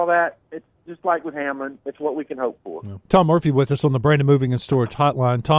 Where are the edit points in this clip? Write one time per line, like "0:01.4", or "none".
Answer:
0:03.1